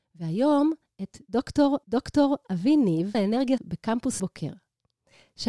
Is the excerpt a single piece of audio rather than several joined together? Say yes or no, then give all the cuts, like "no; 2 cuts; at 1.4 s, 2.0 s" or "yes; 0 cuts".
no; 4 cuts; at 1.8 s, 3.1 s, 3.6 s, 4.2 s